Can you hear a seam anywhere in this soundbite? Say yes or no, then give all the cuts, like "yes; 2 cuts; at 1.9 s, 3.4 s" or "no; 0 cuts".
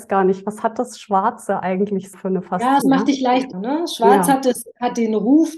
yes; 3 cuts; at 2.1 s, 2.8 s, 3.5 s